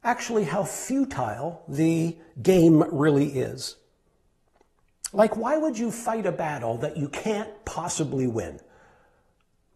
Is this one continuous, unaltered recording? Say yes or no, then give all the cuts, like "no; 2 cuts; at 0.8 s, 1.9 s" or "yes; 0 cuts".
yes; 0 cuts